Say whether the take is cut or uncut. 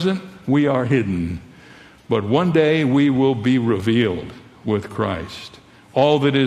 uncut